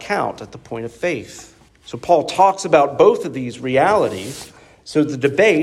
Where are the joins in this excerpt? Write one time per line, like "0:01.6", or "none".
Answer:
0:01.7